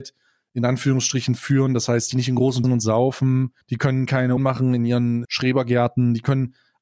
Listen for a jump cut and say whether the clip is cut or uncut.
cut